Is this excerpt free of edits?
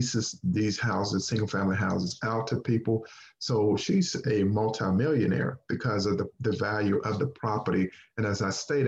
yes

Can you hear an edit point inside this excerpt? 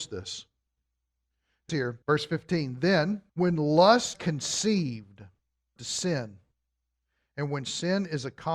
yes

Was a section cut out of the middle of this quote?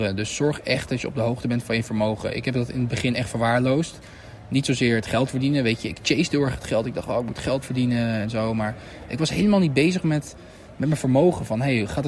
no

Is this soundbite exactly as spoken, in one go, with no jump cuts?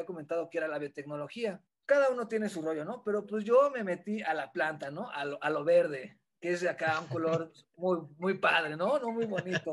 yes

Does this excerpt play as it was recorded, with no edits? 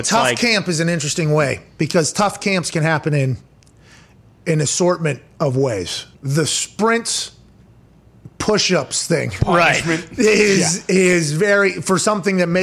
no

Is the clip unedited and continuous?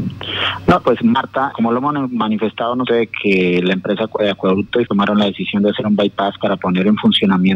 no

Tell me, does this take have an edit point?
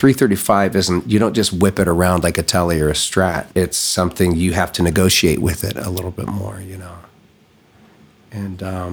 yes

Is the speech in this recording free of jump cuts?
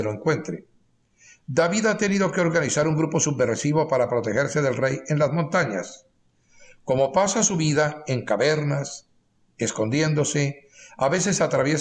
yes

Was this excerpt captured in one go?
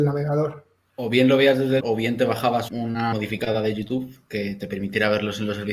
no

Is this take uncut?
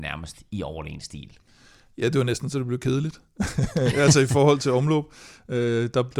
yes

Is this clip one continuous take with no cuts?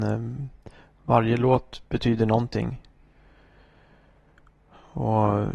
yes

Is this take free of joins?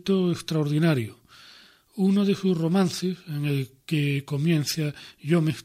yes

